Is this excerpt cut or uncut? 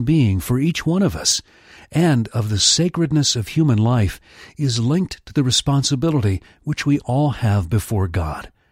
uncut